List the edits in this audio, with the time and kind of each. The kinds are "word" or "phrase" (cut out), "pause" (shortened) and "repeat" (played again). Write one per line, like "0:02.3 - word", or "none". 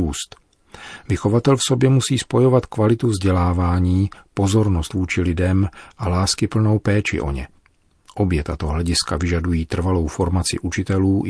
none